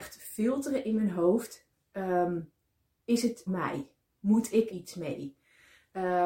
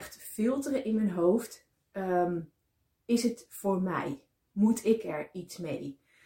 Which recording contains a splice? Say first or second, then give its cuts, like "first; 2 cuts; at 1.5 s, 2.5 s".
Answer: first; 2 cuts; at 3.5 s, 4.7 s